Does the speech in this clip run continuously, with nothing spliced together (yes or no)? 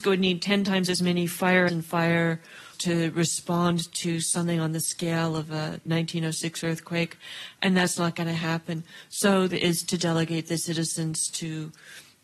no